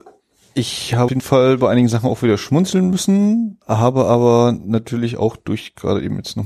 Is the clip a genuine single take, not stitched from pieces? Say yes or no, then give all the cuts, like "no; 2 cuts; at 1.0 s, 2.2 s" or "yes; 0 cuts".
no; 2 cuts; at 1.1 s, 3.6 s